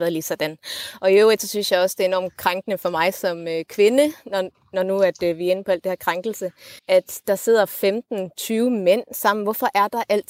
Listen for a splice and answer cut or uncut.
cut